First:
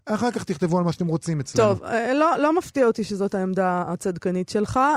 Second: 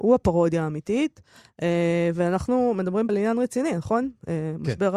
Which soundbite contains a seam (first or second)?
second